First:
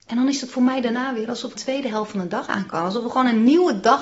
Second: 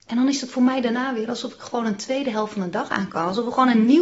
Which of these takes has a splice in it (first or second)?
first